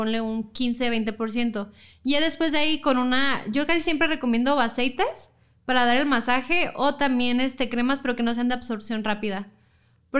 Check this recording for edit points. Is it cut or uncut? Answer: uncut